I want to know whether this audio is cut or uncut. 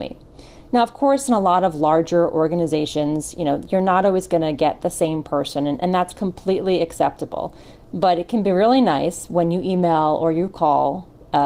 uncut